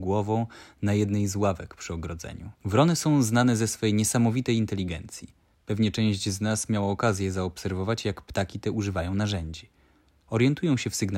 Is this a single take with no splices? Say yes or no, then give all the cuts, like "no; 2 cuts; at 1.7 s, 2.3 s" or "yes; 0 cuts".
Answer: no; 2 cuts; at 2.6 s, 5.5 s